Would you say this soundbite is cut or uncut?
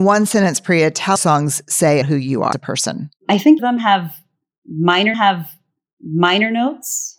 cut